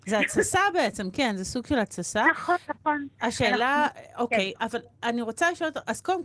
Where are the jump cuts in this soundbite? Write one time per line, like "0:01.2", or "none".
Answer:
0:02.6